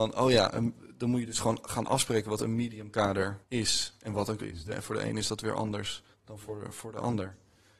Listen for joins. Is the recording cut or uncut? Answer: cut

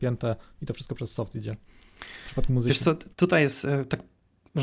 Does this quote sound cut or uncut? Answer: cut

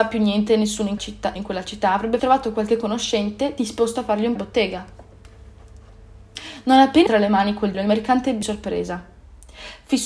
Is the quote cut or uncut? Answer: cut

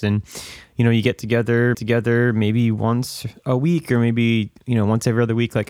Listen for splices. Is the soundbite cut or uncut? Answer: cut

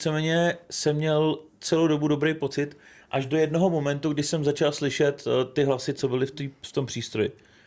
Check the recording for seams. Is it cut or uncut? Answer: uncut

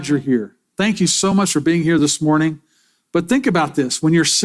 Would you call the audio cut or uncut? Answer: uncut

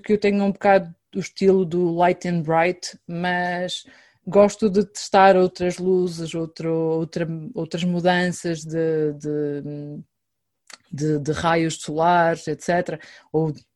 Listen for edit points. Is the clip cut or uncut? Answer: uncut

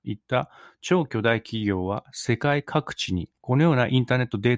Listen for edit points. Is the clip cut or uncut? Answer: cut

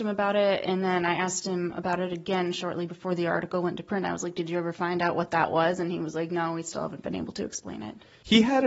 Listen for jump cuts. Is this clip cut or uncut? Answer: uncut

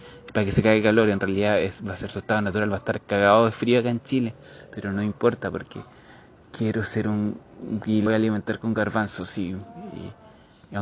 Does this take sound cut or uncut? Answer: cut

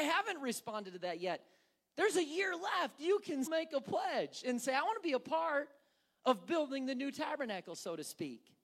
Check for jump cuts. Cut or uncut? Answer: cut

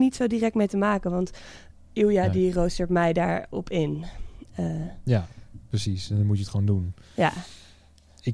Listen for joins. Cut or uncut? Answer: uncut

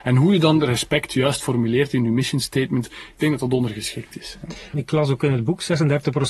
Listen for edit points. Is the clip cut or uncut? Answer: uncut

